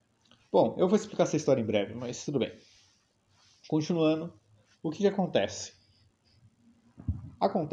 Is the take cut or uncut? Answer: uncut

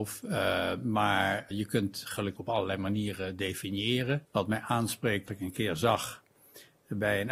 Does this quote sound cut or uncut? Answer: cut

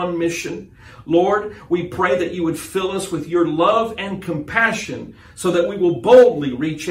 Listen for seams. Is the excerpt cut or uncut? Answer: uncut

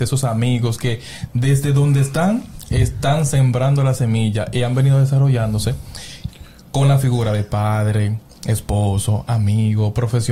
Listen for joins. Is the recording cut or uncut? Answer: uncut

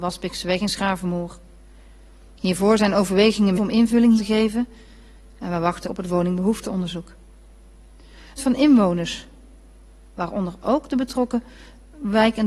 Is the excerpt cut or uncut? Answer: cut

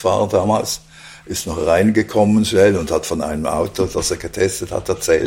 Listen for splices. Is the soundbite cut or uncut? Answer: uncut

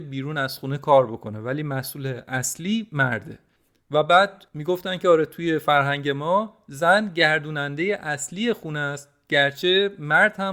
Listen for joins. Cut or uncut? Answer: uncut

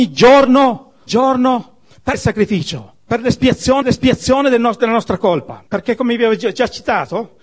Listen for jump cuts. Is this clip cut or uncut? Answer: cut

